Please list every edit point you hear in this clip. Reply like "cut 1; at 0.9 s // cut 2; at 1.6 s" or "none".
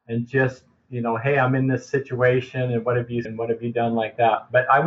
cut 1; at 3.2 s